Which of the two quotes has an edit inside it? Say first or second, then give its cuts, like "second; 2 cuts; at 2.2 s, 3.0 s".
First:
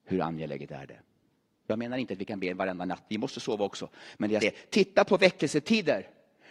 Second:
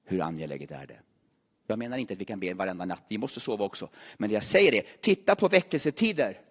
first; 1 cut; at 4.4 s